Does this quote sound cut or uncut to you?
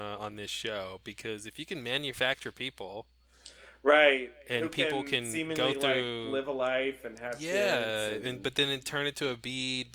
uncut